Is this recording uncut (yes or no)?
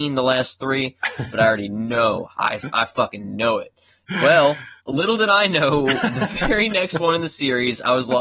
yes